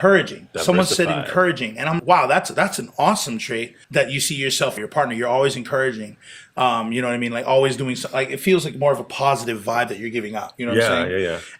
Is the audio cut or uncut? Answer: cut